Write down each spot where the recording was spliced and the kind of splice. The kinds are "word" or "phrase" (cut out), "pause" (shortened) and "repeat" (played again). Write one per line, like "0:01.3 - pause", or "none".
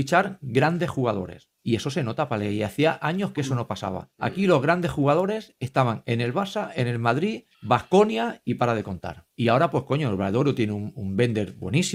0:01.5 - pause
0:04.1 - pause
0:07.5 - pause
0:09.3 - pause